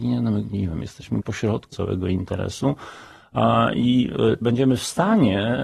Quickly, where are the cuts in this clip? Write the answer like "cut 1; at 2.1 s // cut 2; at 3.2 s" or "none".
cut 1; at 1.2 s // cut 2; at 1.7 s // cut 3; at 4.4 s